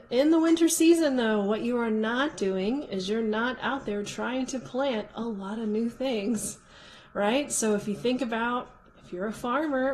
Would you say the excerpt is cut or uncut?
uncut